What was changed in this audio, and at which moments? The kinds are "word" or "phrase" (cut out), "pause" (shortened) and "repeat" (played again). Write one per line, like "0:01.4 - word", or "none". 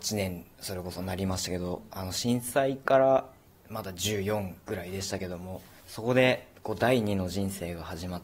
none